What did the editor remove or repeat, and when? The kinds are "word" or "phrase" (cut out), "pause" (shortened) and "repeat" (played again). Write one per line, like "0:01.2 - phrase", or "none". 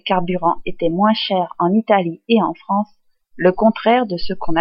none